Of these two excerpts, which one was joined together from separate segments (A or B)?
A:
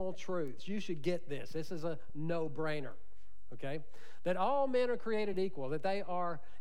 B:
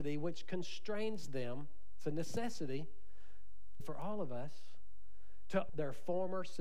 B